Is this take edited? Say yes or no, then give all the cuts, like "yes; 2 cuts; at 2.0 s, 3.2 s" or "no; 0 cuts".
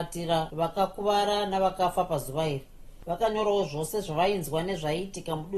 no; 0 cuts